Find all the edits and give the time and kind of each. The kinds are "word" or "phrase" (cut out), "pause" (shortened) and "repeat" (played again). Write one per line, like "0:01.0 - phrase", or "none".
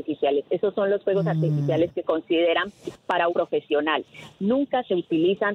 0:02.0 - word
0:03.3 - word

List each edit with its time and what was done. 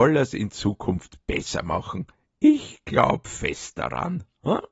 none

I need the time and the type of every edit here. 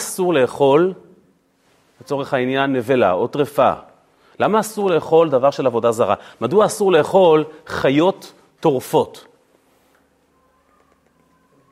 none

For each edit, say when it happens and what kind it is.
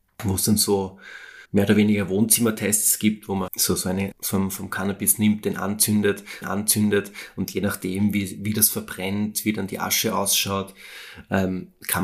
0:01.4 - pause
0:03.5 - word
0:04.1 - phrase
0:06.4 - repeat

